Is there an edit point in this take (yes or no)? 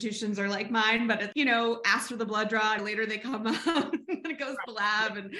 yes